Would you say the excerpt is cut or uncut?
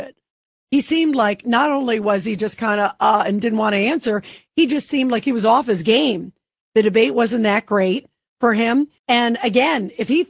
cut